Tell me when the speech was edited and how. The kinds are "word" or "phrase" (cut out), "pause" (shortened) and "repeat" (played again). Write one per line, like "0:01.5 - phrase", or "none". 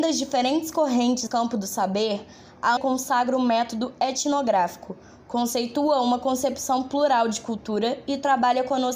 0:01.3 - word
0:02.8 - word